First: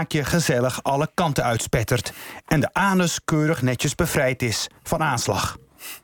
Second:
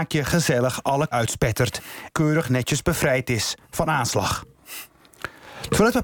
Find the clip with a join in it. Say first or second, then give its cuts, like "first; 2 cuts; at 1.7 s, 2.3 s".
second; 2 cuts; at 1.1 s, 2.1 s